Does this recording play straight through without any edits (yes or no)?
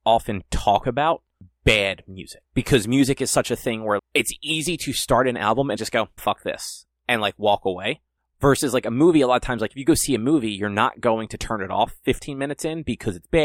no